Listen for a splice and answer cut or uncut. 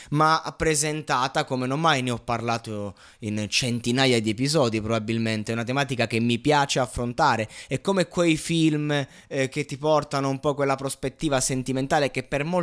uncut